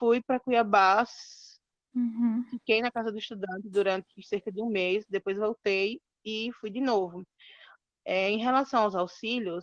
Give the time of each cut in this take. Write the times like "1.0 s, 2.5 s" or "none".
none